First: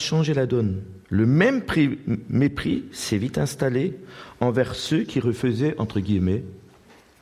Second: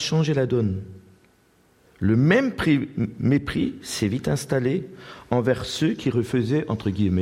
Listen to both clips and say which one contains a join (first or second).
first